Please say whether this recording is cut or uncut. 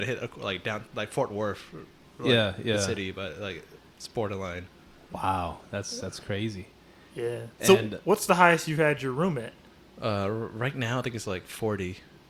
uncut